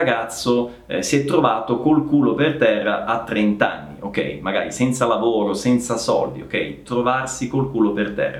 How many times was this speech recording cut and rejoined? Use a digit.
0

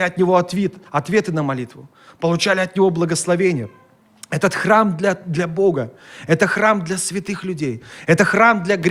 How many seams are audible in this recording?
0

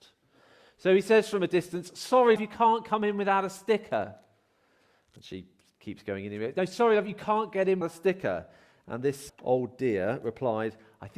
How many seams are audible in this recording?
3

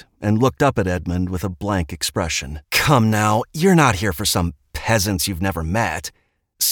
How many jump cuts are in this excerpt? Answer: 1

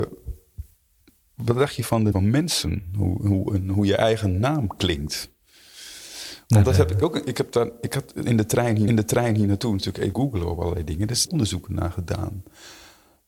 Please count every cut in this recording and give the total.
4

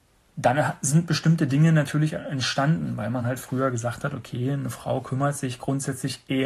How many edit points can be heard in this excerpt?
0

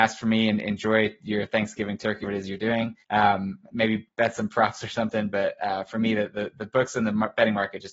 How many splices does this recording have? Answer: 2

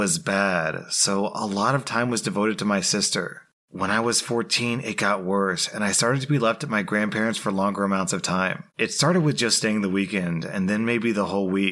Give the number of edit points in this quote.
1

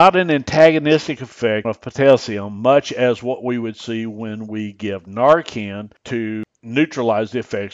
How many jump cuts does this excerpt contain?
1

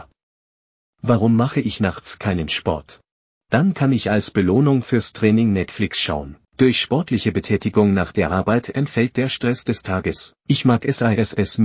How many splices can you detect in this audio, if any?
3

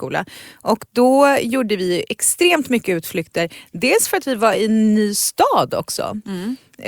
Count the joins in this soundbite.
0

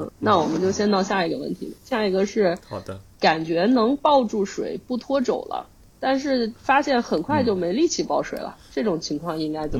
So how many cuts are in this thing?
1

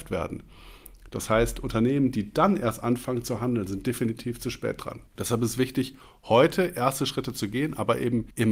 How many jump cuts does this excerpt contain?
0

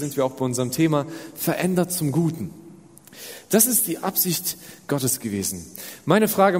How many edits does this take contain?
0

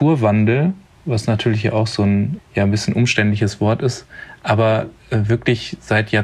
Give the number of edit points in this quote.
1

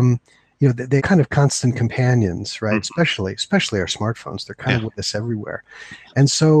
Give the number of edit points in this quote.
1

